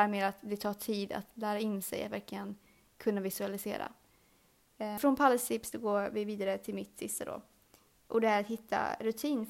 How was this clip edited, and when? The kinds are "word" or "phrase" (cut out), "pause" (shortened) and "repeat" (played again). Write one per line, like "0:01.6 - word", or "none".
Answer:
none